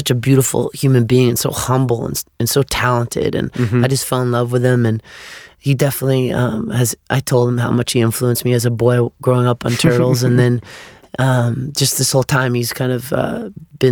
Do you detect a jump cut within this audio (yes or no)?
no